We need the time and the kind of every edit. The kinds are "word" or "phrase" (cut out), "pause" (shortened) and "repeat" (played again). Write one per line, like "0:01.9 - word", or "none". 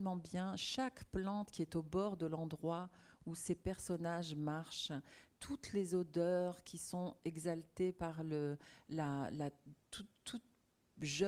none